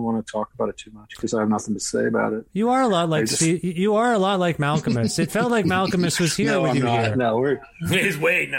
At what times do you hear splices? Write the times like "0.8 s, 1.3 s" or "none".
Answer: none